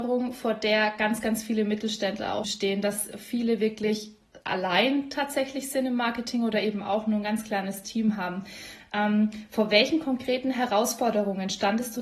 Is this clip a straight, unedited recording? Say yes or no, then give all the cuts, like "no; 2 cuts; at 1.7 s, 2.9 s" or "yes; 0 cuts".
no; 2 cuts; at 2.4 s, 4.4 s